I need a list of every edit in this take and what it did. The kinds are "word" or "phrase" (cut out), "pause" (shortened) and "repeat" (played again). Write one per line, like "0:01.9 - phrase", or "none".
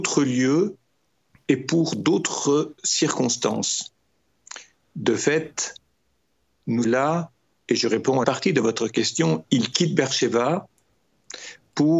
0:06.8 - phrase
0:08.2 - phrase